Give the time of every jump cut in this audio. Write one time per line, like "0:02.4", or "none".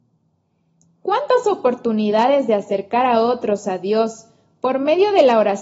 none

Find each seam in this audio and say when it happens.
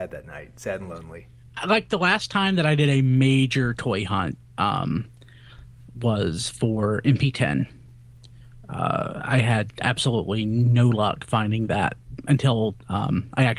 none

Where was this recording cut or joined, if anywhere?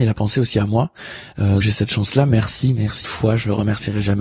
0:01.6
0:03.0

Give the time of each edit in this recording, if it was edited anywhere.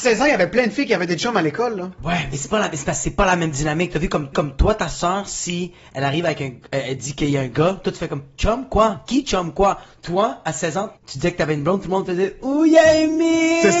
0:04.3
0:11.0

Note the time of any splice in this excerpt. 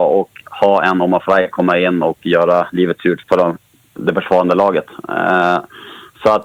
0:03.2

